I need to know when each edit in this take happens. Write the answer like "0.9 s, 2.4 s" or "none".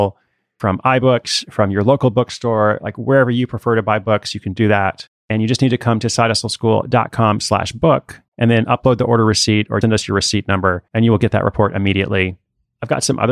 5.2 s, 8.3 s, 9.8 s, 10.9 s